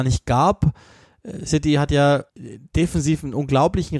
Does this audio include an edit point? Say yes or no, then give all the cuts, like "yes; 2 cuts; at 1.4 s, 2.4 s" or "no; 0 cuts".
yes; 1 cut; at 2.3 s